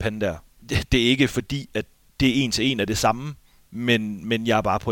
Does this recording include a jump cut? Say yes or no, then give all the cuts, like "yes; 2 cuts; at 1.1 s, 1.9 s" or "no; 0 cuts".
no; 0 cuts